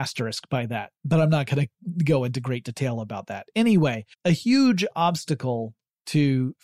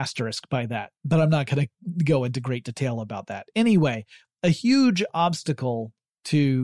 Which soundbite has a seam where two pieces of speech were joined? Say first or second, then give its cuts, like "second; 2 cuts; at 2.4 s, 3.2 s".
first; 1 cut; at 4.1 s